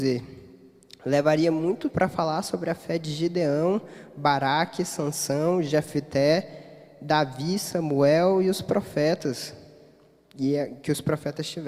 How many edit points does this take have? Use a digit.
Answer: 1